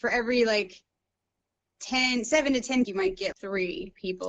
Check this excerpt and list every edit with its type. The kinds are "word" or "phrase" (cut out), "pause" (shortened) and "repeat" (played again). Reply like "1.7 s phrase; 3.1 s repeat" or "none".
2.8 s phrase; 3.3 s word